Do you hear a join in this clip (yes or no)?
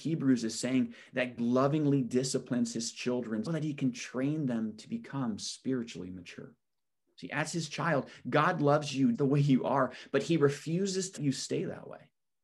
yes